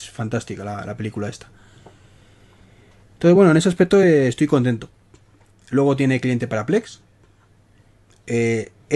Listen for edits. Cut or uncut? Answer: uncut